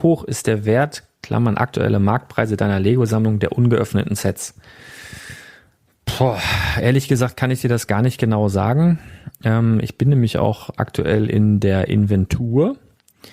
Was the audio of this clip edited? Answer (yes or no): no